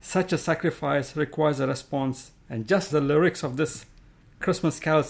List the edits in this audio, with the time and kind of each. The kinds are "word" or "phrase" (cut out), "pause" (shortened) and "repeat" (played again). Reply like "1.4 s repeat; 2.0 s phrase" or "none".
2.4 s pause; 2.9 s word